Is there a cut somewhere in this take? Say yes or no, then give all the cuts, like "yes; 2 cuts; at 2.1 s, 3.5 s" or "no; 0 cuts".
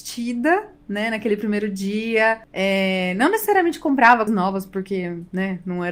yes; 1 cut; at 4.3 s